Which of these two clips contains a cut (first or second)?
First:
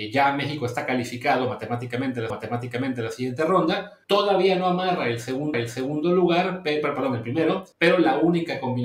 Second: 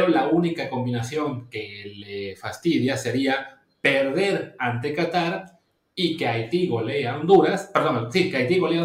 first